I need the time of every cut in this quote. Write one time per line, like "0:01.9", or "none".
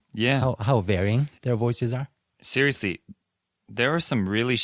none